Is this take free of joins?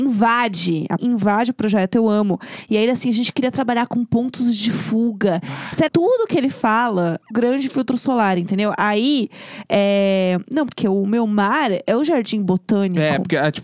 no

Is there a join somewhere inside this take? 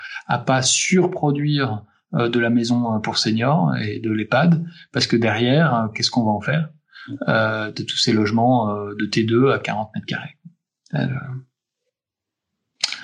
no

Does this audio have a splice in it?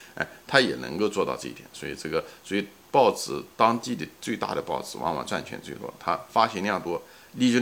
no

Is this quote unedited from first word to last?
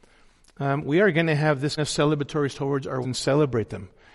no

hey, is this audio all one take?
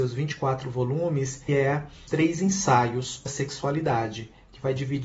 no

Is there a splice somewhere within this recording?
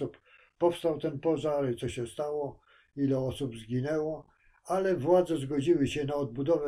no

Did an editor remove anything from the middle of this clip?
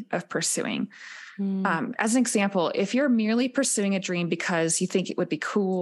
no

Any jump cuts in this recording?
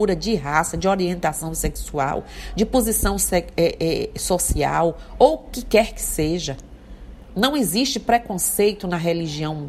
no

